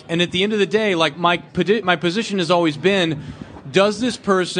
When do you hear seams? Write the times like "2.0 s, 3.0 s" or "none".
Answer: 1.1 s, 1.8 s